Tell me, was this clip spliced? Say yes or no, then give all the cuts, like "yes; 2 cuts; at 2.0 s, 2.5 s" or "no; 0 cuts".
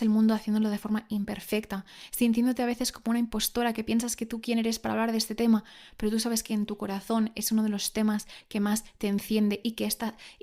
no; 0 cuts